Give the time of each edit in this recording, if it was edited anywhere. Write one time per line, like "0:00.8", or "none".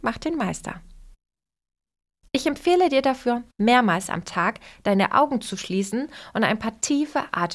none